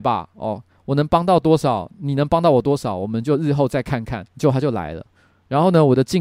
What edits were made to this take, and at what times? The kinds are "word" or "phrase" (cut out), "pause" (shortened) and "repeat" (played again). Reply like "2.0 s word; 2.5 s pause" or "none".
4.3 s pause